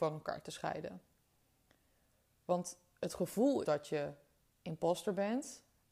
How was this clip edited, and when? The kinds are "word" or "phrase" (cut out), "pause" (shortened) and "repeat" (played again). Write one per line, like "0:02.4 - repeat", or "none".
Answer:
0:03.6 - word